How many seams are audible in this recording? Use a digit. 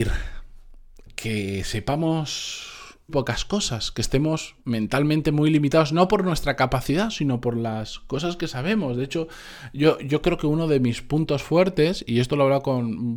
2